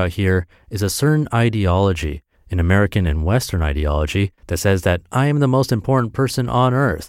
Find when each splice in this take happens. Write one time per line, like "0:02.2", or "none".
0:04.4